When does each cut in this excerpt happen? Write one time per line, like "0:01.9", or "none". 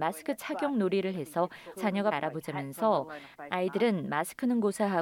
0:01.8
0:02.1